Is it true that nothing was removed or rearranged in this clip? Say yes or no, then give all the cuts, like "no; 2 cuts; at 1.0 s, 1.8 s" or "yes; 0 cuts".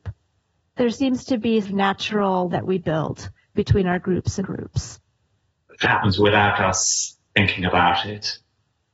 no; 5 cuts; at 1.6 s, 2.5 s, 4.4 s, 5.8 s, 7.3 s